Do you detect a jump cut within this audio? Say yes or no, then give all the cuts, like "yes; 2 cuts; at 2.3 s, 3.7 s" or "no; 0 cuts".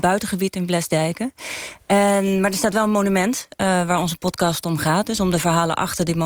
no; 0 cuts